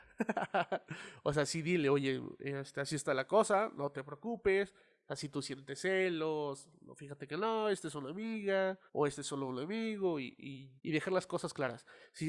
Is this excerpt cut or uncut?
cut